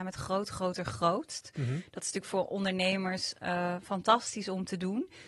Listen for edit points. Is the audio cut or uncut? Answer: uncut